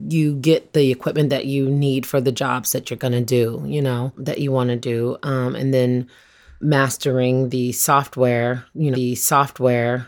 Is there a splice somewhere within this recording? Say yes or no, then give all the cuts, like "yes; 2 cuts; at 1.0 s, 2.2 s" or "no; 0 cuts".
yes; 2 cuts; at 6.6 s, 8.9 s